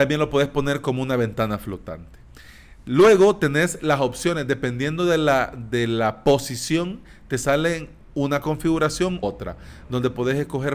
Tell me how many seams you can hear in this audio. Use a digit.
1